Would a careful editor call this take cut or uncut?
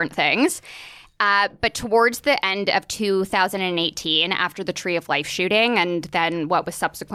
uncut